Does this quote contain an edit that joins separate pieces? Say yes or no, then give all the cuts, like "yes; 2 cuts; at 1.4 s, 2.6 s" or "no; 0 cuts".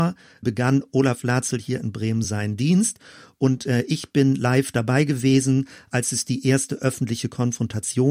no; 0 cuts